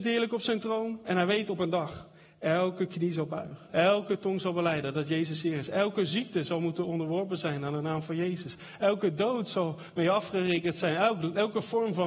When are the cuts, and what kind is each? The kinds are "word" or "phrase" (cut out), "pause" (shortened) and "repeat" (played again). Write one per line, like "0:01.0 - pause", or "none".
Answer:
0:03.7 - pause